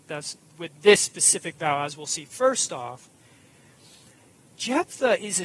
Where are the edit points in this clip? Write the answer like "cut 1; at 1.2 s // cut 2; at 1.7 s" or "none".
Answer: none

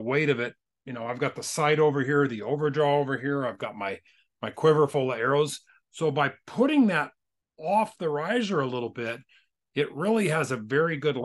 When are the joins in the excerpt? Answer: none

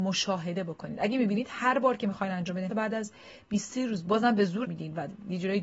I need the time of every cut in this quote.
cut 1; at 2.7 s // cut 2; at 4.6 s

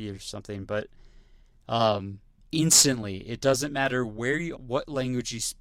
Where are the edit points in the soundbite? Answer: cut 1; at 2.4 s // cut 2; at 4.5 s

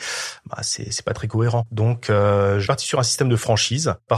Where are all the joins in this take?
cut 1; at 2.7 s

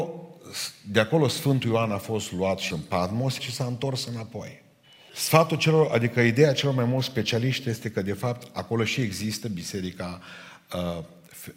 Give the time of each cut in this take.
cut 1; at 2.7 s // cut 2; at 3.4 s // cut 3; at 4.8 s

